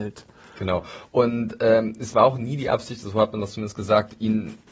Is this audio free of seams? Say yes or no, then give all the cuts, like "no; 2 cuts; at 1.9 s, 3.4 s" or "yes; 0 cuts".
yes; 0 cuts